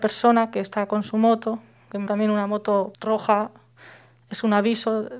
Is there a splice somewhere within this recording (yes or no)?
yes